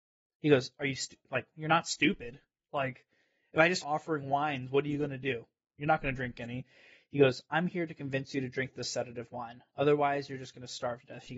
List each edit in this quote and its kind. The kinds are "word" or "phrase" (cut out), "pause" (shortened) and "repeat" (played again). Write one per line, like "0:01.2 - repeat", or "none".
0:03.8 - word